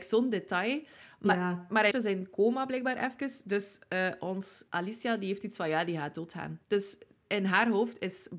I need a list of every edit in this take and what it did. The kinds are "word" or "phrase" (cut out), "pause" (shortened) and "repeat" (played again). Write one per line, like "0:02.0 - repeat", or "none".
0:01.9 - word
0:04.7 - word
0:06.6 - pause